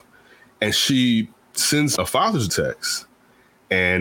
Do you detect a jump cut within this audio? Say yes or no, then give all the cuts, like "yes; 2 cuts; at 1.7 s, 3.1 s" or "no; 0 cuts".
yes; 2 cuts; at 2.0 s, 2.5 s